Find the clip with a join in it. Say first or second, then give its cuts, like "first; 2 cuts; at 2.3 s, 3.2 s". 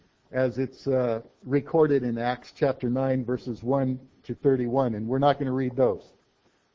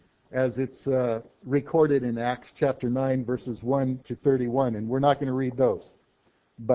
second; 1 cut; at 4.0 s